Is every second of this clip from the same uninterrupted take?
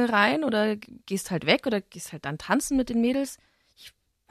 yes; 0 cuts

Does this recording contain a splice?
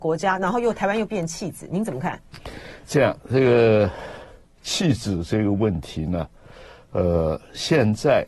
no; 0 cuts

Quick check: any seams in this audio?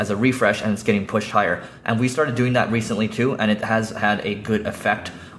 no; 0 cuts

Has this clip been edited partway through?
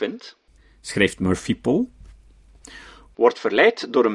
no; 0 cuts

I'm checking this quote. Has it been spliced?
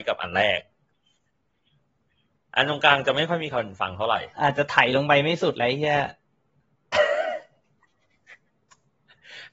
yes; 1 cut; at 4.3 s

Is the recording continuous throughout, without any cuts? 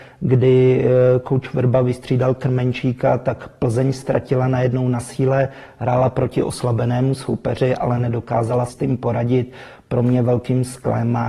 no; 1 cut; at 8.7 s

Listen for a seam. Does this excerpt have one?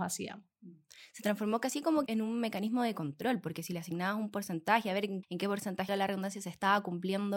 yes; 3 cuts; at 2.1 s, 5.2 s, 5.9 s

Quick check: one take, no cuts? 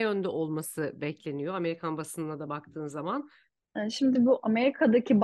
yes; 0 cuts

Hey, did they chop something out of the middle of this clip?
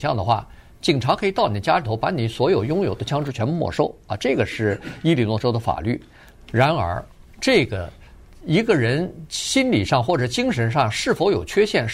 no; 0 cuts

